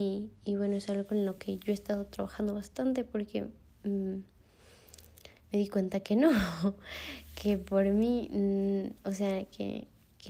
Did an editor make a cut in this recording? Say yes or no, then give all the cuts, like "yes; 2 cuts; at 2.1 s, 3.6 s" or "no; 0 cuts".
no; 0 cuts